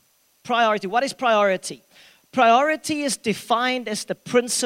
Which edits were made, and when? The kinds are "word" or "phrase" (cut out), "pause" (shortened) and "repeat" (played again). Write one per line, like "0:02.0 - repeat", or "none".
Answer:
none